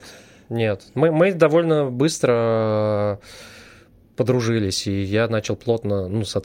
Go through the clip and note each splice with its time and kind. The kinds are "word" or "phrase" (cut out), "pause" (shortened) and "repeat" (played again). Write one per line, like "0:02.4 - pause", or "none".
none